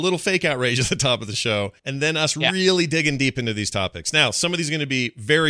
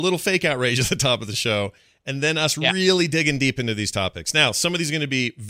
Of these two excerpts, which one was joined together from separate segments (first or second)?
first